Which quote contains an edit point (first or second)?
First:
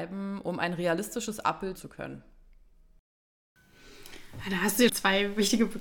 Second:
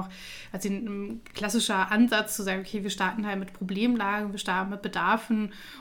first